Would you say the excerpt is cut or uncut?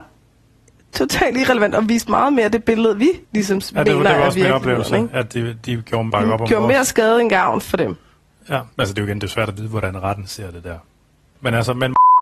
cut